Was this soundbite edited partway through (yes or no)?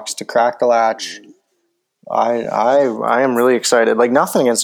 no